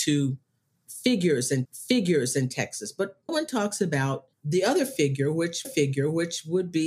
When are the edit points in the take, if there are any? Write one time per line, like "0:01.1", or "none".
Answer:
0:01.6
0:03.3
0:04.3
0:05.6

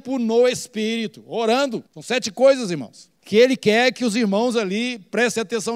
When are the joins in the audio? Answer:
0:01.9
0:03.2

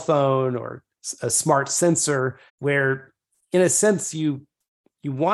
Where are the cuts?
0:02.5

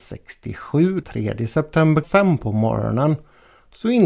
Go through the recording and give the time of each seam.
0:01.0
0:02.0

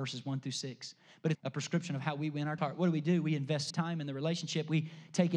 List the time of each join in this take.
0:01.3
0:02.6
0:03.7

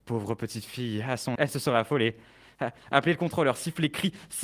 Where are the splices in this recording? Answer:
0:01.3

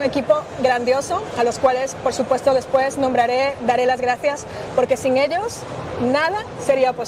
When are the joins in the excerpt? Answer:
none

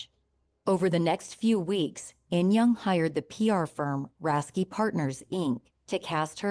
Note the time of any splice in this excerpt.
none

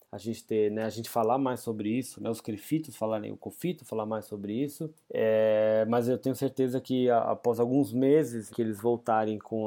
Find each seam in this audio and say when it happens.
0:05.0
0:08.5

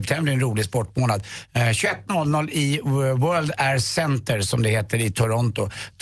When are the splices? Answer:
none

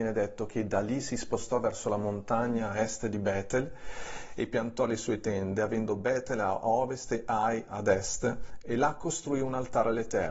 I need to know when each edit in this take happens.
none

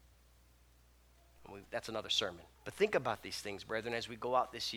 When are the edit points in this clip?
0:01.6
0:02.6

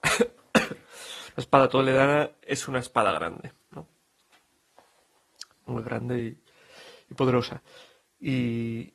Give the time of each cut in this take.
none

